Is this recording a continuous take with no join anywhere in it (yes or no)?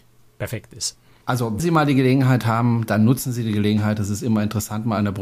no